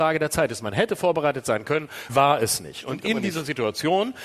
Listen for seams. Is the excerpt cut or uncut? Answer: cut